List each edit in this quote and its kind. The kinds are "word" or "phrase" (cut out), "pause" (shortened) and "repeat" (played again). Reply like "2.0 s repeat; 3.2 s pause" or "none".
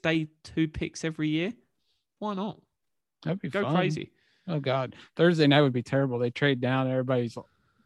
none